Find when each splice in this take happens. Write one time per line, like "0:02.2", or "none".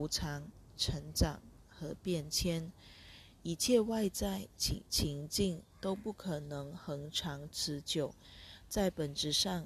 0:04.9